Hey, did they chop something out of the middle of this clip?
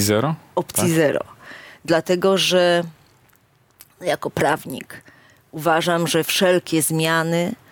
no; 0 cuts

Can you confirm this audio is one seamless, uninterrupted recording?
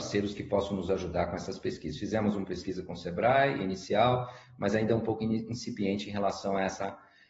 yes; 0 cuts

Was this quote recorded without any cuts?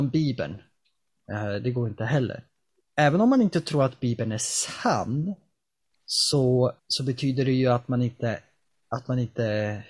no; 1 cut; at 6.8 s

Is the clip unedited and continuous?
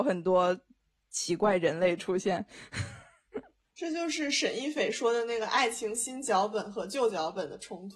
yes; 0 cuts

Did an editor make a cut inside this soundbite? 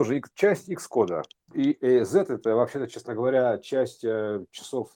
yes; 1 cut; at 1.4 s

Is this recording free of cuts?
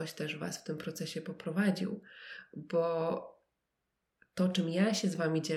yes; 0 cuts

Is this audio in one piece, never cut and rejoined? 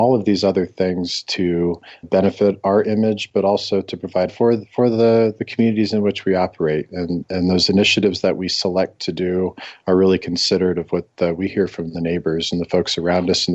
no; 2 cuts; at 2.0 s, 4.3 s

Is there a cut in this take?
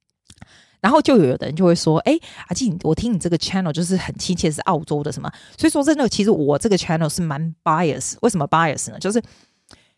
no; 0 cuts

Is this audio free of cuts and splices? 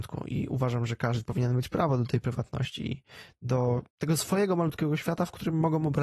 no; 1 cut; at 3.9 s

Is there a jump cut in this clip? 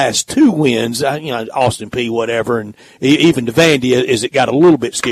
no; 0 cuts

